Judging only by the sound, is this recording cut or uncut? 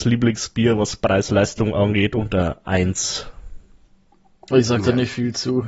cut